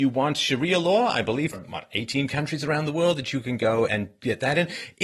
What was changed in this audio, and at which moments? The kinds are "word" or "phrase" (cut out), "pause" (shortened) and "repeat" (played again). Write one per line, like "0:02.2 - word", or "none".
0:01.5 - word
0:03.9 - word